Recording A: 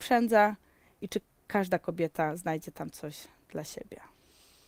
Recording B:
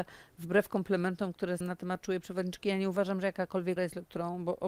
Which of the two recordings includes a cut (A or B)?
B